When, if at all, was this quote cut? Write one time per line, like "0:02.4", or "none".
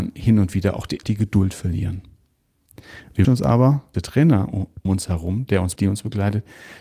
0:01.0
0:03.2
0:03.9
0:04.9
0:05.8